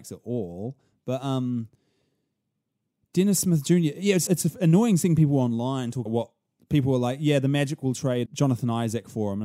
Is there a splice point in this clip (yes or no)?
yes